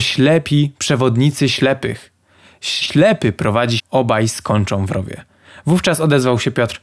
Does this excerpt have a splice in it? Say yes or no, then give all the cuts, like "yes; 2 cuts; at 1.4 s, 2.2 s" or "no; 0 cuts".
yes; 2 cuts; at 2.8 s, 3.8 s